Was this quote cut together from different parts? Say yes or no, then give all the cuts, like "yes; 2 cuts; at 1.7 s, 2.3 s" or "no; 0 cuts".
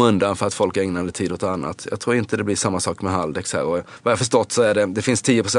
no; 0 cuts